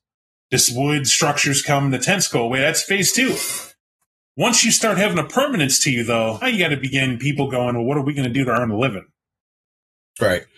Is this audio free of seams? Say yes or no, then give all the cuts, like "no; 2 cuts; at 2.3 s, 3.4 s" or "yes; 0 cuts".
no; 1 cut; at 6.4 s